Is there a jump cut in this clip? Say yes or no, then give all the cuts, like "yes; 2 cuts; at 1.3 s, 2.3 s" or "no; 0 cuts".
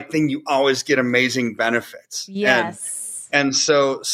no; 0 cuts